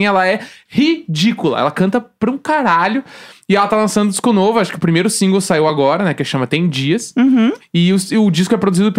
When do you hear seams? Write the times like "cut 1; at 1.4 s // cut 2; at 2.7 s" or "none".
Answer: none